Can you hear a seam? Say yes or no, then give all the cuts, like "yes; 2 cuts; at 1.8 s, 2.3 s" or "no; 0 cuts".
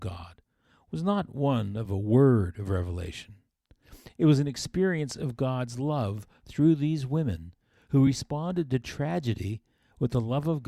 no; 0 cuts